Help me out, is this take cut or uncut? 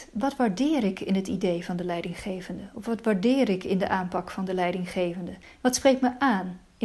cut